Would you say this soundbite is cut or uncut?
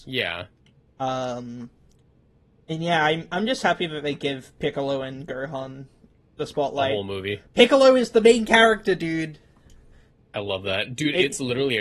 uncut